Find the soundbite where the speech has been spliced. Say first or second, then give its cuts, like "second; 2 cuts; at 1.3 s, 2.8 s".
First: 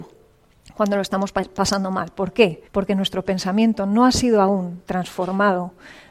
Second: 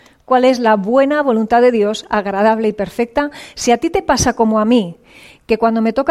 first; 1 cut; at 2.6 s